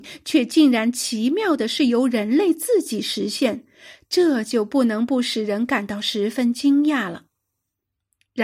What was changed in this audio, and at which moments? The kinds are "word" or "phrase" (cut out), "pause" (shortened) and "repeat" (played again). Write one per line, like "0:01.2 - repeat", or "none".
none